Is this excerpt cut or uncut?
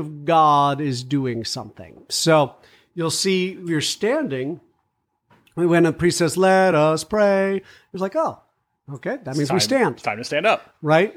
uncut